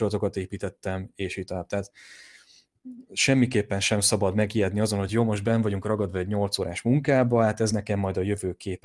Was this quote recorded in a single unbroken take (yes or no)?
yes